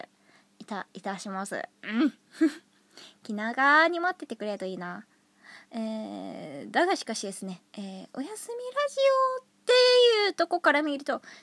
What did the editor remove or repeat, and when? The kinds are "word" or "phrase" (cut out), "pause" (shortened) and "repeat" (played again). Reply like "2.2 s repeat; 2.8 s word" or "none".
1.7 s pause; 5.7 s pause; 7.7 s pause